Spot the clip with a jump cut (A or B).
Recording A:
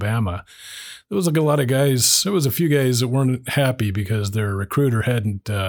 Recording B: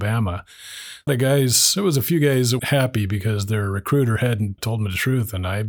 B